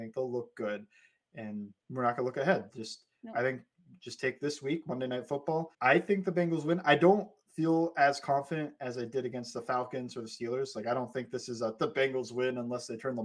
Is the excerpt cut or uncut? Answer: cut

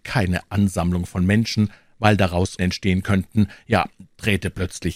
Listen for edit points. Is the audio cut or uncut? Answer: cut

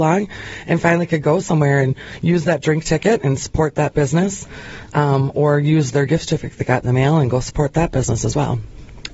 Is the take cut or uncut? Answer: uncut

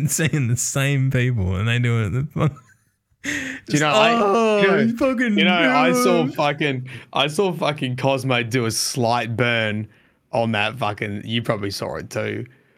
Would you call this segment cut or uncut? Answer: uncut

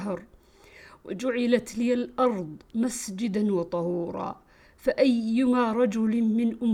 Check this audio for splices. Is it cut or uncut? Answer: uncut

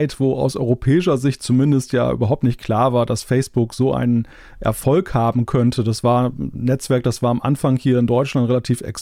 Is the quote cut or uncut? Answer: uncut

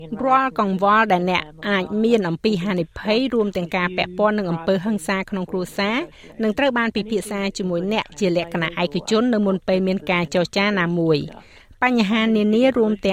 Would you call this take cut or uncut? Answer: uncut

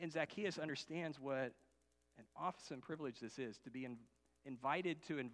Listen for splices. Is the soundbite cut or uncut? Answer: uncut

